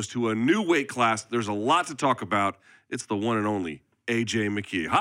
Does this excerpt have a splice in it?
no; 0 cuts

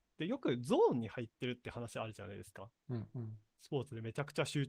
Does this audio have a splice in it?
yes; 1 cut; at 3.5 s

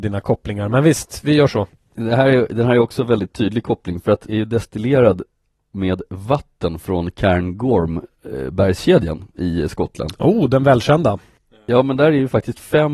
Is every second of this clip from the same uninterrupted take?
no; 1 cut; at 4.3 s

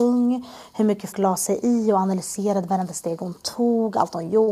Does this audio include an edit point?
yes; 1 cut; at 1.1 s

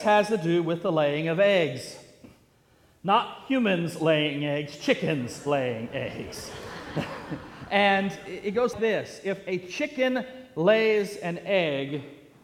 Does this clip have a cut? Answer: yes; 1 cut; at 8.7 s

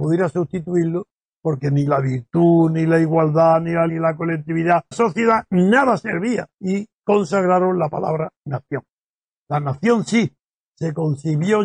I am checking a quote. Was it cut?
yes; 3 cuts; at 3.9 s, 4.9 s, 6.5 s

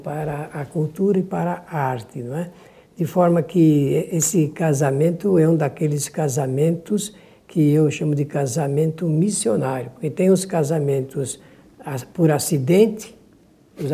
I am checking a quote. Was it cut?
no; 0 cuts

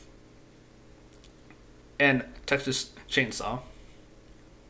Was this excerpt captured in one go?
yes; 0 cuts

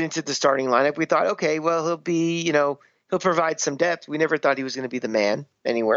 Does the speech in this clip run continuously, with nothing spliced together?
yes; 0 cuts

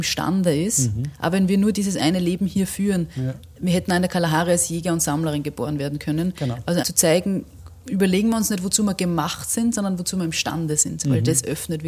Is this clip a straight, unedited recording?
no; 1 cut; at 6.8 s

